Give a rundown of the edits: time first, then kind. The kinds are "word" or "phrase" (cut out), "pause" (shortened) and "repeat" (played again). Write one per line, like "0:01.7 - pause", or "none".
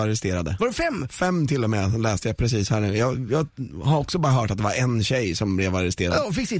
none